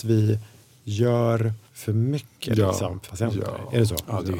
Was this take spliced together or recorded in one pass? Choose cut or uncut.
cut